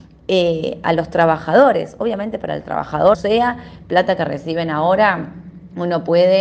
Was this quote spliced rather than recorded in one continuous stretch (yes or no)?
yes